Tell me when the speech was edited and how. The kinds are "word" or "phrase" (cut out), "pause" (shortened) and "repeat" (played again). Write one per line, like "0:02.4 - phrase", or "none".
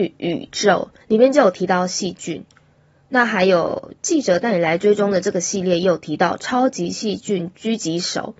0:01.0 - pause